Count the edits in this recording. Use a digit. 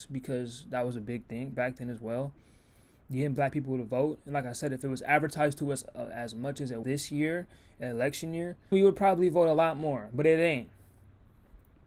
3